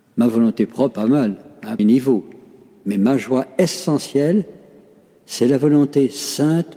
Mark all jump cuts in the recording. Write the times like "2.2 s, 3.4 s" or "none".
0.9 s, 1.8 s